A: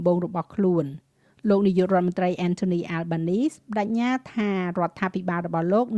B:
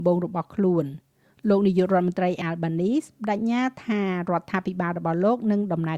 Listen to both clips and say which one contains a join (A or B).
B